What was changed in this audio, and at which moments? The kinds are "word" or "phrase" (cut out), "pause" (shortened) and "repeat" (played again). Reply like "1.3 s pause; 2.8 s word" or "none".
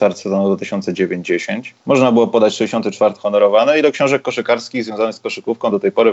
1.8 s pause; 3.2 s phrase